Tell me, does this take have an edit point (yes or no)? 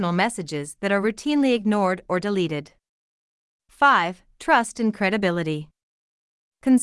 no